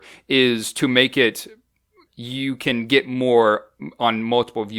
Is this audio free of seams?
no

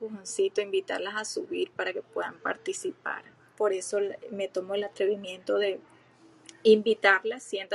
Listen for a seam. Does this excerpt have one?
no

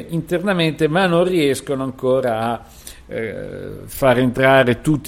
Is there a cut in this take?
no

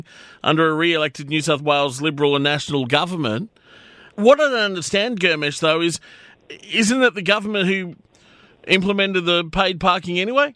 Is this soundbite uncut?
yes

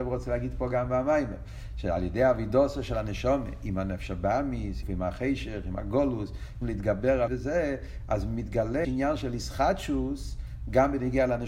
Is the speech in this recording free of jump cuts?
no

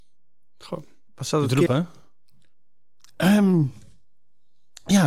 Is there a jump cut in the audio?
yes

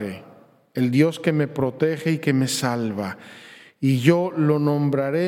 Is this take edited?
no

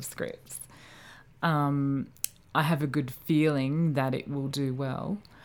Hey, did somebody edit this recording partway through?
no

